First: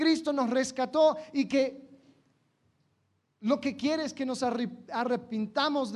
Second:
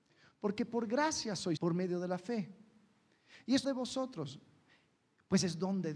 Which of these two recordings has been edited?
second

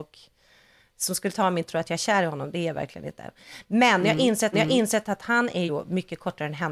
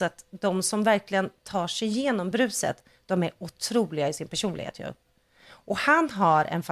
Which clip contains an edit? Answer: first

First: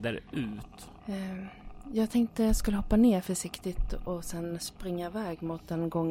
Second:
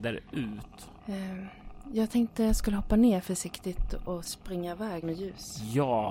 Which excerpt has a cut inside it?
second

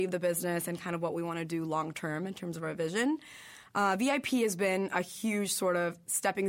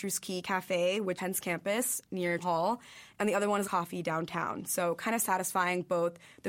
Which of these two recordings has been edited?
second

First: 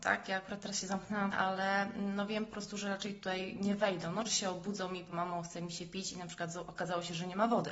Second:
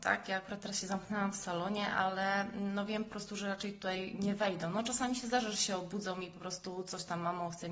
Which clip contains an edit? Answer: first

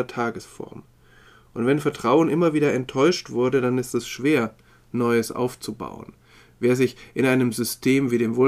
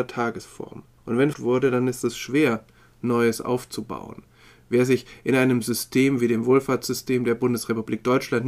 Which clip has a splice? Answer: second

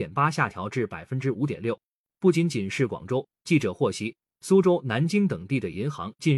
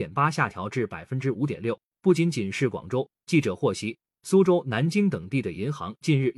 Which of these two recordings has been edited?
second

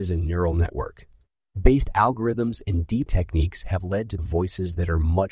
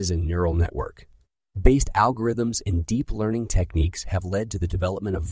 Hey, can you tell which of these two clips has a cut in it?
first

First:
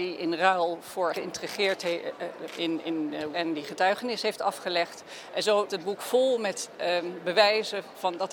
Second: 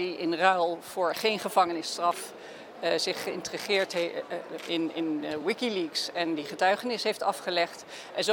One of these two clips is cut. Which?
first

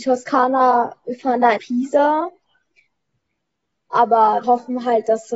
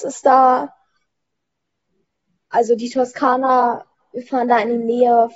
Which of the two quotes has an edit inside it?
first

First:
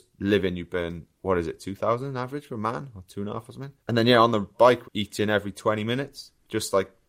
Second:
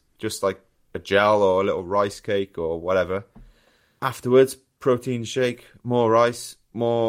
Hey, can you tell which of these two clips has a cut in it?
first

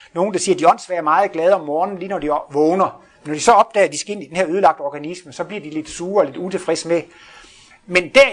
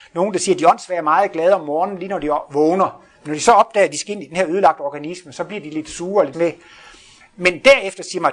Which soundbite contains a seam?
second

